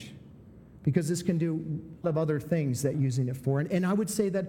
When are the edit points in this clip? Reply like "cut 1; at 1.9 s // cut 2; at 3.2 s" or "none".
cut 1; at 2.0 s // cut 2; at 2.9 s